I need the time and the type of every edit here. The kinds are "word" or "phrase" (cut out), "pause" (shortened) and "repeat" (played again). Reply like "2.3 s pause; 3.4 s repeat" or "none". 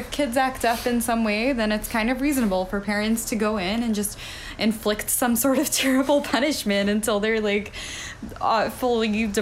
none